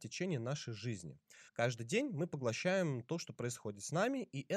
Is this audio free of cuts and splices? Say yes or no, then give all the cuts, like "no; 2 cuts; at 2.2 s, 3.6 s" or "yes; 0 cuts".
no; 1 cut; at 1.5 s